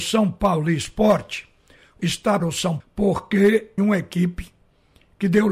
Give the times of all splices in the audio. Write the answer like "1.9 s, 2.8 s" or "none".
2.0 s, 2.4 s, 2.8 s, 3.8 s